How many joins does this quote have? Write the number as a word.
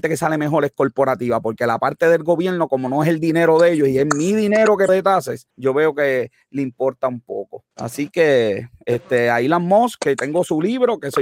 three